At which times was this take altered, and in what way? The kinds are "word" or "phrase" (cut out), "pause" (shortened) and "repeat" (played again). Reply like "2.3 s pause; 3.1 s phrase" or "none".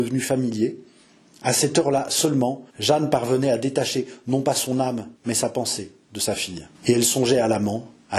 2.7 s pause; 5.1 s pause; 6.7 s pause